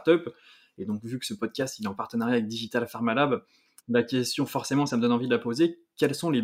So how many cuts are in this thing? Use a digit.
0